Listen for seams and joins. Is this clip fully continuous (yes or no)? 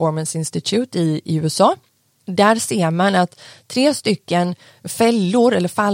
yes